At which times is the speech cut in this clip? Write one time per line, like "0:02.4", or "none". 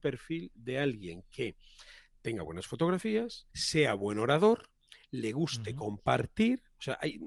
0:03.5